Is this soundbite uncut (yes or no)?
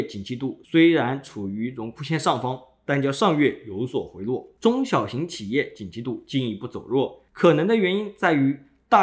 yes